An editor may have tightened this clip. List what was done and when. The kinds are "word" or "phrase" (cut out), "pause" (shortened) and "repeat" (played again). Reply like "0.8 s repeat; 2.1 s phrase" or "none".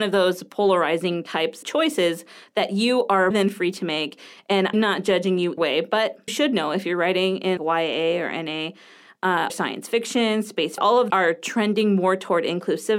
1.6 s word; 3.3 s word; 4.7 s word; 5.6 s word; 6.3 s word; 7.6 s word; 9.5 s word; 10.8 s word; 11.1 s word